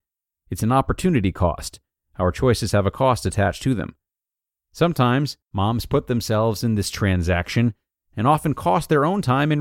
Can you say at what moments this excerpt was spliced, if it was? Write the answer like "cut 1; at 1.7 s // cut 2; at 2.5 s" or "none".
cut 1; at 5.4 s